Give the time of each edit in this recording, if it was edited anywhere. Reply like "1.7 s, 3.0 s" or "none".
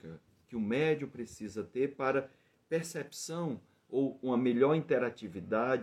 none